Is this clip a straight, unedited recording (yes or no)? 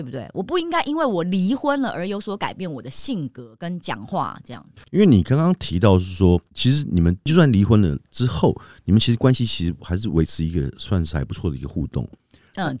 no